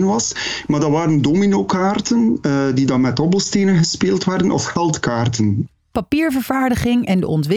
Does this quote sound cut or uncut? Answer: uncut